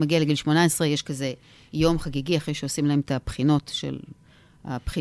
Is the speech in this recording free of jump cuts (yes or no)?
yes